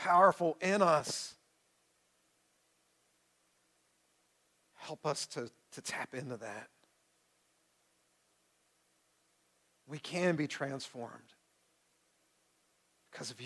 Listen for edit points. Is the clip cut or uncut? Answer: uncut